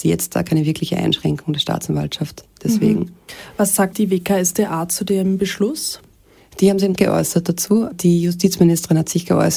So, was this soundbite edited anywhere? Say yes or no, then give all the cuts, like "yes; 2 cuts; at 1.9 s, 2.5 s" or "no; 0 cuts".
yes; 2 cuts; at 3.9 s, 7.0 s